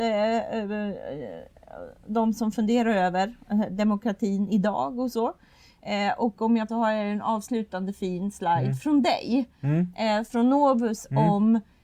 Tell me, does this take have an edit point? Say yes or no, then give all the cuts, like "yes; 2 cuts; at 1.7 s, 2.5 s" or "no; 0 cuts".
yes; 1 cut; at 6.7 s